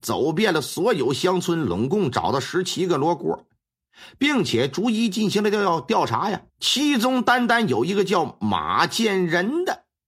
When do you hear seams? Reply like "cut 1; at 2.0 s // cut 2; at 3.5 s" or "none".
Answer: cut 1; at 6.5 s